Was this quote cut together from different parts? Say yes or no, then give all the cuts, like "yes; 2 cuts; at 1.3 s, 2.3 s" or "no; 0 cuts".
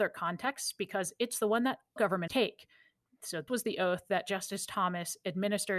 yes; 3 cuts; at 2.0 s, 2.3 s, 3.5 s